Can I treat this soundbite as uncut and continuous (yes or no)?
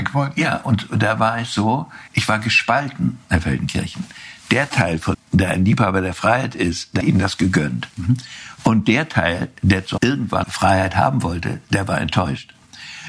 no